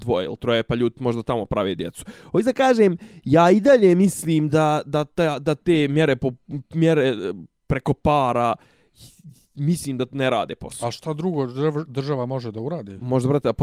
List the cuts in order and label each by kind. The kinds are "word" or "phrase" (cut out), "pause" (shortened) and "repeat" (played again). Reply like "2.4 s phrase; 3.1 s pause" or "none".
none